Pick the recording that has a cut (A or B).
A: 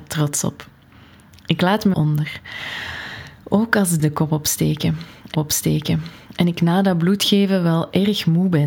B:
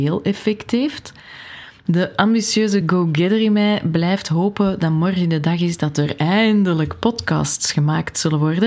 A